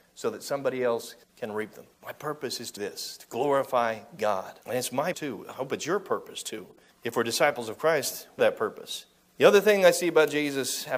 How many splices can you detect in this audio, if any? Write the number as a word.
eight